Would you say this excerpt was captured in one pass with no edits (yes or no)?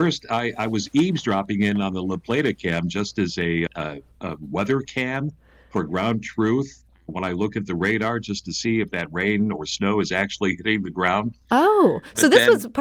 no